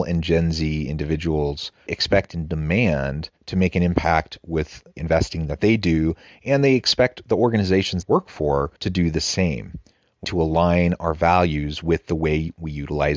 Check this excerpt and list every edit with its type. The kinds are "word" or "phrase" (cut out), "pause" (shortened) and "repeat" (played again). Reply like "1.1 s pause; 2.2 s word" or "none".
1.9 s word; 3.4 s pause; 5.0 s word; 8.0 s word; 8.8 s pause; 10.2 s word